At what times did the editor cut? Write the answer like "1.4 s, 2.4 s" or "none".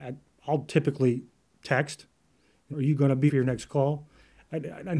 2.7 s, 3.3 s